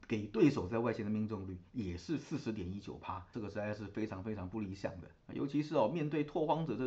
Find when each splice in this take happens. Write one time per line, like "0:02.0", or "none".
0:03.3
0:05.2